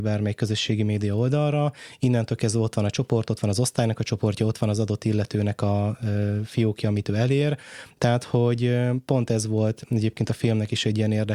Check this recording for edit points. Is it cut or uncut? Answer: uncut